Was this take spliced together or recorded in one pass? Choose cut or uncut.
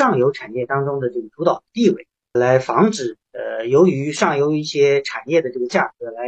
cut